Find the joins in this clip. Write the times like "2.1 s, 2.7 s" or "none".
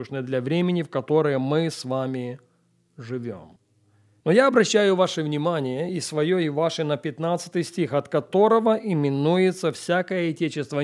none

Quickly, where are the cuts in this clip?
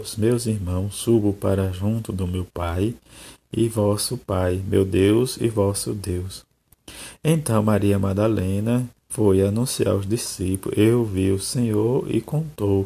9.0 s

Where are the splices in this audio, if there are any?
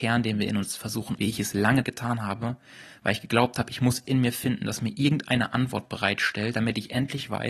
1.2 s, 1.8 s, 4.0 s

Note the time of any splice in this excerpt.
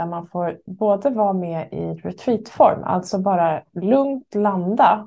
none

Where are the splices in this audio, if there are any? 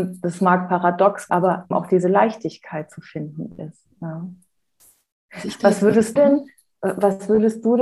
1.3 s, 1.7 s, 6.2 s

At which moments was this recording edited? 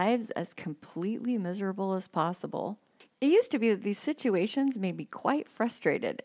none

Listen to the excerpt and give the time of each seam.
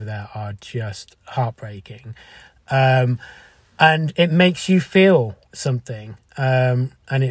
none

